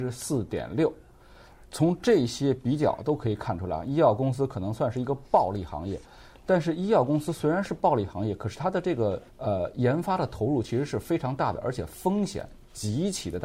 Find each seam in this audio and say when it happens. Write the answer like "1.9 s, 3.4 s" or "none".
9.3 s